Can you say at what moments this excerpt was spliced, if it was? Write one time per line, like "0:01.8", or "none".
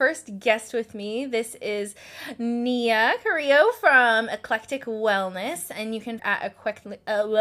0:06.2